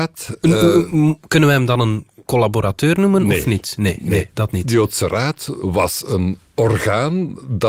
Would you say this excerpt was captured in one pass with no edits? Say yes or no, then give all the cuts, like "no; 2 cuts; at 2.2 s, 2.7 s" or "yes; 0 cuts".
yes; 0 cuts